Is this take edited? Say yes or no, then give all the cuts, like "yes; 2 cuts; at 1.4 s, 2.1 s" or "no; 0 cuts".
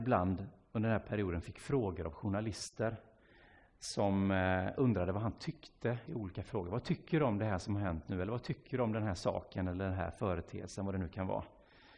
no; 0 cuts